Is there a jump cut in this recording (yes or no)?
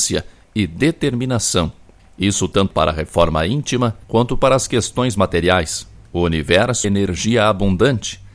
yes